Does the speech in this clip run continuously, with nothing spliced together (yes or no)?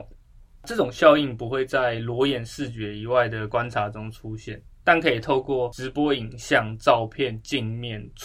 yes